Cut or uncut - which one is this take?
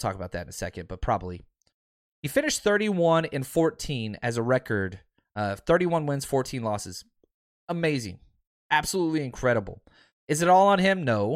uncut